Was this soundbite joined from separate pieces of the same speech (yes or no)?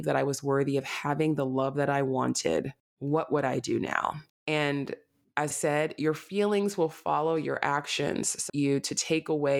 yes